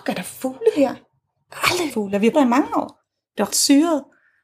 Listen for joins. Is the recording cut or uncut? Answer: cut